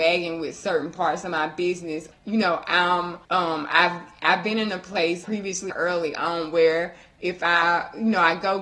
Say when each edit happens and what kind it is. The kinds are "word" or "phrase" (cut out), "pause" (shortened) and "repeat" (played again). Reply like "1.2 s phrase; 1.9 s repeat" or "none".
2.1 s word; 3.2 s pause; 5.2 s word; 5.7 s word